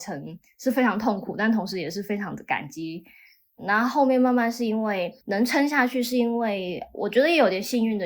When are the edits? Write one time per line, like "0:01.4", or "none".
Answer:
0:05.2